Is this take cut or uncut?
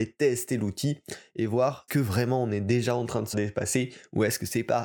cut